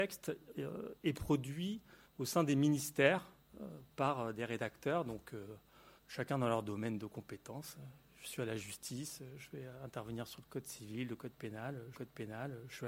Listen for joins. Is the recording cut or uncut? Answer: cut